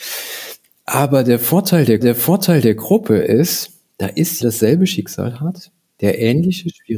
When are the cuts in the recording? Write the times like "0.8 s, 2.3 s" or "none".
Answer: 2.0 s, 4.4 s